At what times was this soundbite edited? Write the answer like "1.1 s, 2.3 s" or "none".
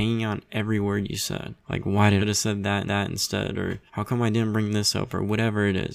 1.6 s, 2.2 s, 2.9 s, 3.9 s